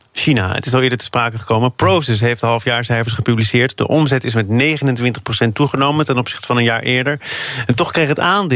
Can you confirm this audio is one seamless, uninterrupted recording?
yes; 0 cuts

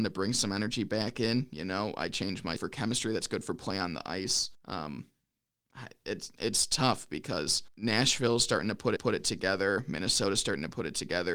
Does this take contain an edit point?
yes; 4 cuts; at 2.6 s, 4.5 s, 7.7 s, 9.0 s

